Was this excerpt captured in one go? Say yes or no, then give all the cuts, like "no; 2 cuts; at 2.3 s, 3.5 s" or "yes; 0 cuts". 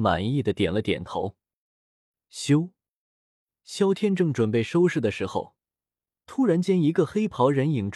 yes; 0 cuts